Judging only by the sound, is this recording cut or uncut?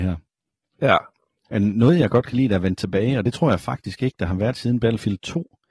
uncut